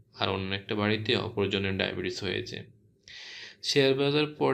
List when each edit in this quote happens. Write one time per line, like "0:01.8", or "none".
none